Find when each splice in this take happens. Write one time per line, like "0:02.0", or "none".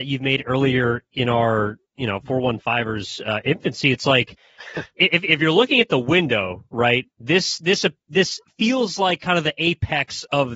0:01.8
0:07.1